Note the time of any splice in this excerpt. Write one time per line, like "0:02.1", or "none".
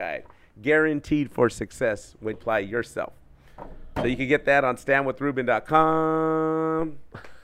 0:02.3